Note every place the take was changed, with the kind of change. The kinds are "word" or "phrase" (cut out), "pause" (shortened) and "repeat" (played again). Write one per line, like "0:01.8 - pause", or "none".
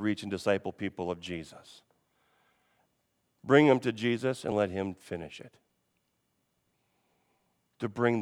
none

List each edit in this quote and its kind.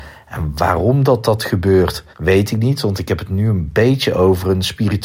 0:02.1 - pause

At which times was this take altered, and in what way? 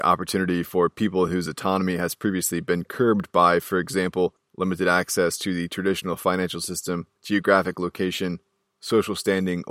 none

